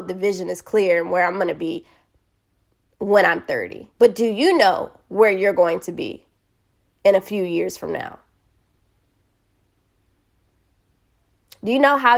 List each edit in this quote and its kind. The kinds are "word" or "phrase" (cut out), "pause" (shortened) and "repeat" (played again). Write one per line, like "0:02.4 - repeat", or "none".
0:03.9 - pause